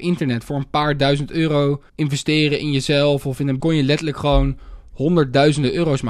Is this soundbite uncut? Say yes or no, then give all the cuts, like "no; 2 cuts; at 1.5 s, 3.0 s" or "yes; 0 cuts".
no; 2 cuts; at 1.9 s, 3.6 s